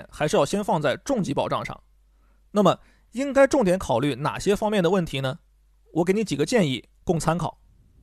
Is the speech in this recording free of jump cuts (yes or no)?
yes